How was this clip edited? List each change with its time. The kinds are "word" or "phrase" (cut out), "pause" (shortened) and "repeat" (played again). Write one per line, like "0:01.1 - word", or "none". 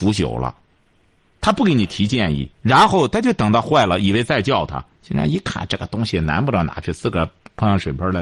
0:02.5 - pause